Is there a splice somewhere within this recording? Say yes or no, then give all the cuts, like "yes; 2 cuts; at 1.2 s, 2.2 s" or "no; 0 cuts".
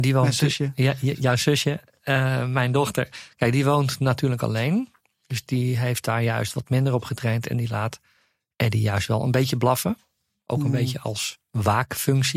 no; 0 cuts